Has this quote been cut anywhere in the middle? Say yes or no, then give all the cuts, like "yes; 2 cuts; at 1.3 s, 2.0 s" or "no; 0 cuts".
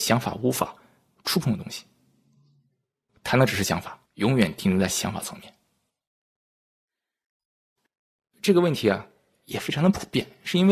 yes; 2 cuts; at 3.1 s, 4.1 s